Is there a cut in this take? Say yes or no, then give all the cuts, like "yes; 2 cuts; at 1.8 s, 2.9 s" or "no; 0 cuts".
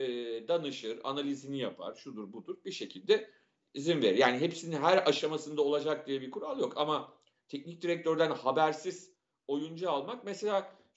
no; 0 cuts